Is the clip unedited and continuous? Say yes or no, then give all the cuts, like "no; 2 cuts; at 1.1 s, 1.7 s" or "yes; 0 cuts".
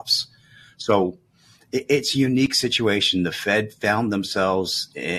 yes; 0 cuts